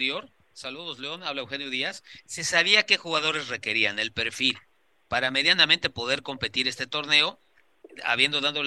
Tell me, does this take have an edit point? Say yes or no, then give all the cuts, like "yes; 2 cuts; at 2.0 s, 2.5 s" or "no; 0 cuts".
no; 0 cuts